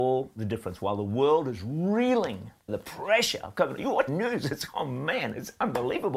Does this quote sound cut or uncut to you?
cut